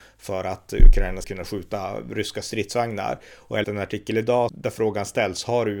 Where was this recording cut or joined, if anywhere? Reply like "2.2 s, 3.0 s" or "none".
1.2 s, 3.6 s, 4.5 s